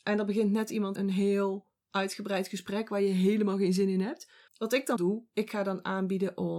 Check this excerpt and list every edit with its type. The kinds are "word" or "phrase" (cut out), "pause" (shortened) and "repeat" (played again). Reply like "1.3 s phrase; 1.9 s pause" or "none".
0.9 s word; 4.5 s pause; 5.0 s word